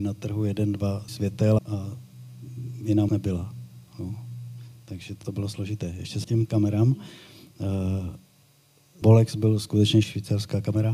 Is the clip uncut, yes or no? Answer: no